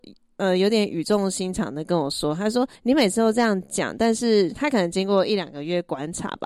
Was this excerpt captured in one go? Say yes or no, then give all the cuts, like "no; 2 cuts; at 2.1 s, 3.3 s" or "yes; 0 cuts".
no; 1 cut; at 2.8 s